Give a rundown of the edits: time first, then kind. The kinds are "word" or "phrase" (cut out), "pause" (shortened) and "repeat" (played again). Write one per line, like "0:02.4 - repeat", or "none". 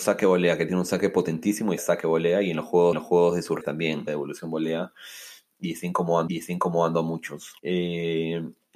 0:01.8 - word
0:02.9 - repeat
0:03.6 - word
0:04.1 - word
0:06.3 - repeat
0:07.6 - pause

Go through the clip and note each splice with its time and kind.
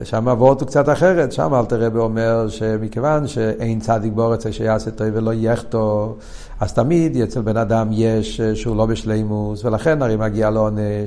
none

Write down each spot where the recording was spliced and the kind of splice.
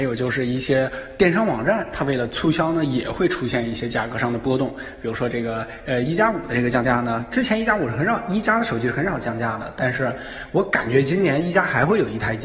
none

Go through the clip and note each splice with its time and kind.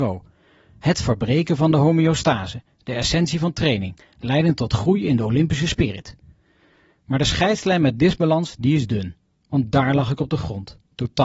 none

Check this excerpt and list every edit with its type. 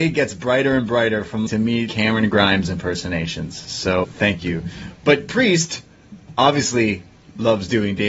0:01.5 - word
0:01.9 - word
0:04.0 - word
0:05.3 - word

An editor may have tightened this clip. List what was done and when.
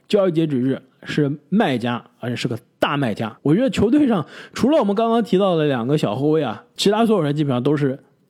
0:03.4 - pause

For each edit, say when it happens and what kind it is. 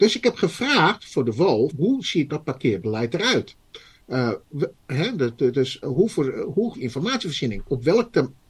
0:01.7 - word
0:02.3 - word
0:05.8 - word
0:06.7 - word

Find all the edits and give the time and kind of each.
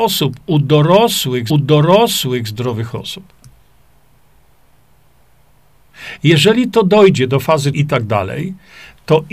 0:01.5 - repeat
0:07.7 - word

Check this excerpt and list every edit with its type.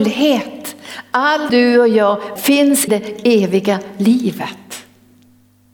0:01.5 - word
0:02.4 - word
0:02.9 - word

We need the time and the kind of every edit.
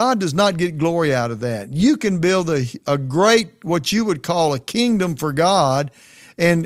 none

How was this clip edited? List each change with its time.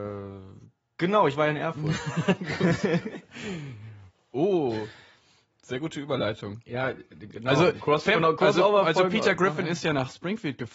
none

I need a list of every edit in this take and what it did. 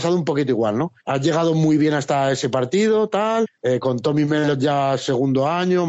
0:01.0 - pause

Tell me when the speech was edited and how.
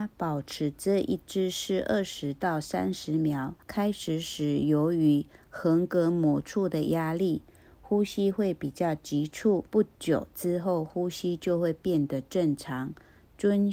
0:03.6 - pause
0:09.7 - pause

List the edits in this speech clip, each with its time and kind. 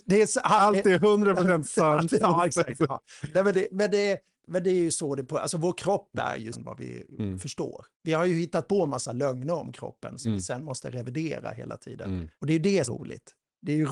0:06.5 - word
0:07.9 - pause
0:12.3 - pause
0:12.8 - phrase

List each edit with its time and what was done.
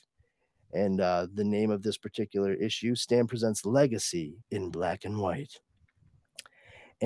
0:04.4 - pause

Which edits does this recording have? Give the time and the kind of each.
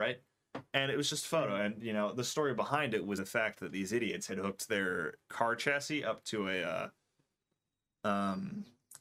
0:03.2 - word

